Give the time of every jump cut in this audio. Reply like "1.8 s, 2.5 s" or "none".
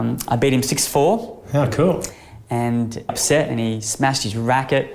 3.1 s